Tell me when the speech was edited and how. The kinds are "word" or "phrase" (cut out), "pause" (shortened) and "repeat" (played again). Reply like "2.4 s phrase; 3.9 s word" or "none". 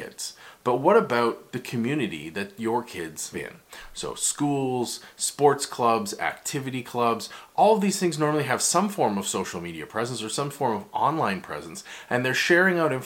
3.3 s word